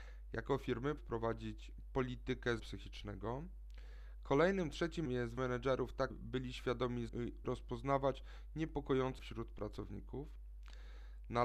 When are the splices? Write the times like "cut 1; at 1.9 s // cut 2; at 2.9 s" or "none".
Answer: cut 1; at 1.0 s // cut 2; at 2.6 s // cut 3; at 5.1 s // cut 4; at 5.4 s // cut 5; at 6.1 s // cut 6; at 7.1 s // cut 7; at 7.4 s // cut 8; at 9.2 s